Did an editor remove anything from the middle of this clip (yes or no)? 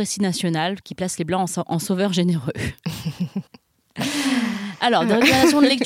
yes